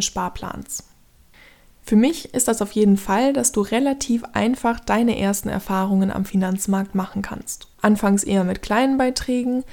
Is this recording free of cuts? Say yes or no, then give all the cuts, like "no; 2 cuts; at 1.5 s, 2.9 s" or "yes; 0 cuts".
no; 1 cut; at 7.7 s